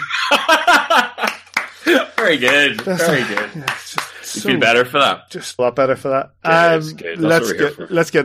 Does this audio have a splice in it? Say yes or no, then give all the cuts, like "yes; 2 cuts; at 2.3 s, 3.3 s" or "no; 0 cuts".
yes; 1 cut; at 5.6 s